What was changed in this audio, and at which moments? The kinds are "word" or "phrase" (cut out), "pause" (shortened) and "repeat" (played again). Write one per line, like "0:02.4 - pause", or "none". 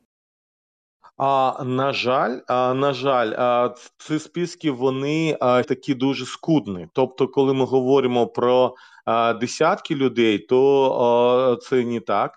0:05.6 - word